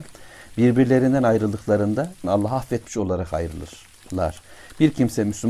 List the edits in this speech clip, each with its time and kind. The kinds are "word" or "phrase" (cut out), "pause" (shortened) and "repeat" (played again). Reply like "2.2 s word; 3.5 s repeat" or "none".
2.2 s phrase